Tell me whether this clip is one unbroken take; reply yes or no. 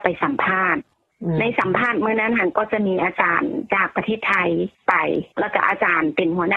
no